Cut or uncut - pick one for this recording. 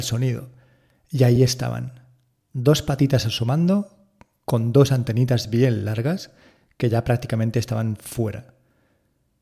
uncut